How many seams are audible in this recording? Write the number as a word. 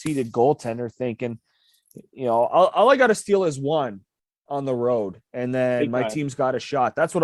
zero